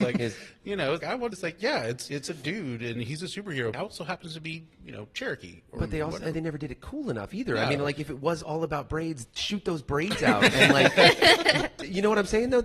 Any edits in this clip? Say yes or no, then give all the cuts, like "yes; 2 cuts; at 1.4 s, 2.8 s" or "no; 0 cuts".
yes; 5 cuts; at 1.0 s, 1.3 s, 3.7 s, 6.3 s, 9.2 s